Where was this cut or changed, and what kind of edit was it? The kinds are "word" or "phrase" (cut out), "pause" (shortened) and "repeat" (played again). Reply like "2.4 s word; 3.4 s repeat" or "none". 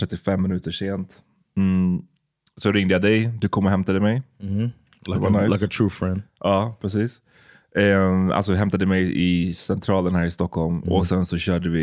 none